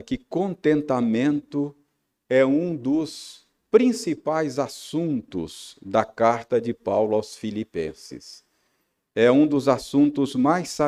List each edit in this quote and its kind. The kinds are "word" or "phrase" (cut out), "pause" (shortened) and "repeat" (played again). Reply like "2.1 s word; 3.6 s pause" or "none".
none